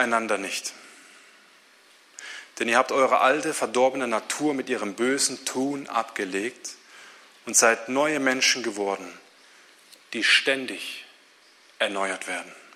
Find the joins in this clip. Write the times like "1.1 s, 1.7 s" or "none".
none